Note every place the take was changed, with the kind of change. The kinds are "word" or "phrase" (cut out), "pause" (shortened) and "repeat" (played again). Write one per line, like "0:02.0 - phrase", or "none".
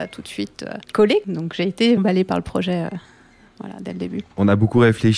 0:02.0 - word